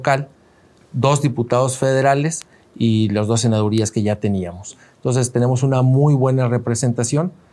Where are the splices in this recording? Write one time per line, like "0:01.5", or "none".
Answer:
none